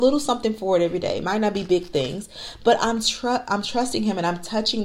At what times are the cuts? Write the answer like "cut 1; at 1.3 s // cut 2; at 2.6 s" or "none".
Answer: none